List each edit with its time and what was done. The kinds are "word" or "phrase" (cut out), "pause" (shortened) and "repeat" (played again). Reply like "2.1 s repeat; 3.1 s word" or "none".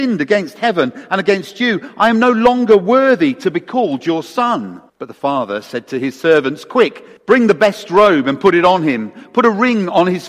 4.9 s pause; 7.2 s pause